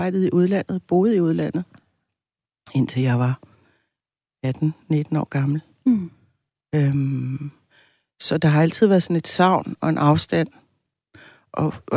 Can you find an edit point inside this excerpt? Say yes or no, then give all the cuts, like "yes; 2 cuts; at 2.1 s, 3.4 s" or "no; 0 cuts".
no; 0 cuts